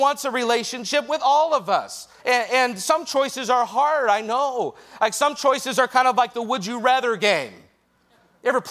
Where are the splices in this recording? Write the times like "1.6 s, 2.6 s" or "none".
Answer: 2.2 s